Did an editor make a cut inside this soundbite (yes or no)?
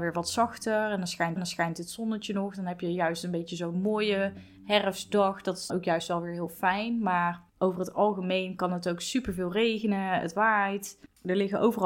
yes